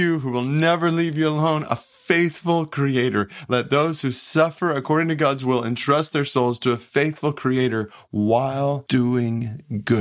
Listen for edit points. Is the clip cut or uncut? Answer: uncut